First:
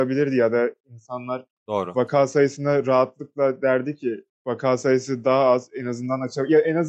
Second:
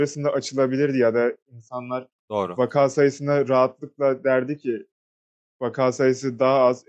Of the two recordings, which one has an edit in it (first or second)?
first